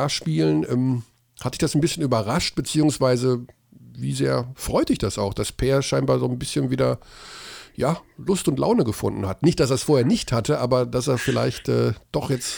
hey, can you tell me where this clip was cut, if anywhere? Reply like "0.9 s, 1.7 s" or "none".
none